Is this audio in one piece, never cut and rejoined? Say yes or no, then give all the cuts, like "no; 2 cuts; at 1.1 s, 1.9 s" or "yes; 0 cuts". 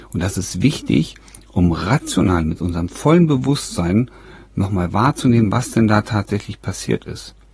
yes; 0 cuts